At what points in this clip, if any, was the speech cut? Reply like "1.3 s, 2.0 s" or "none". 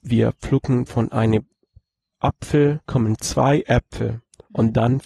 2.8 s